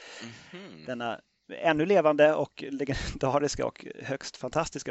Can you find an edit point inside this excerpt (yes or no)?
no